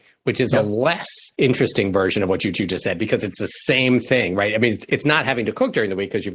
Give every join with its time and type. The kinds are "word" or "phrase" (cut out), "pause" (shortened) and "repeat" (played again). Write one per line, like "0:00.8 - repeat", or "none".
0:01.3 - pause
0:02.5 - repeat
0:04.9 - word